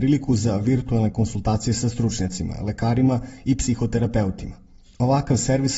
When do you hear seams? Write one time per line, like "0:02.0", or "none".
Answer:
none